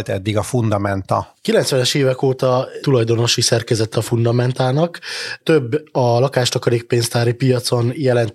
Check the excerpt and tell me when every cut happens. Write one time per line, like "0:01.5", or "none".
0:02.8
0:03.9